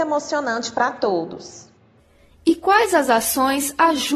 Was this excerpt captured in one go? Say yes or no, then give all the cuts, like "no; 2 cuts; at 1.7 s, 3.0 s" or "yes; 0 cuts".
yes; 0 cuts